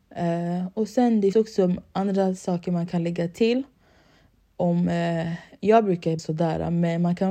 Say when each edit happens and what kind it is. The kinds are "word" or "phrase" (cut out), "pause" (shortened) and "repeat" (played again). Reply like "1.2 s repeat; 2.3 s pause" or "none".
1.3 s word; 6.2 s word